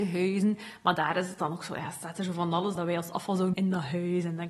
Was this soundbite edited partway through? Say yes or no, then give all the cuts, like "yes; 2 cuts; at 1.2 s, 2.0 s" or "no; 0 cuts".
yes; 2 cuts; at 2.8 s, 3.5 s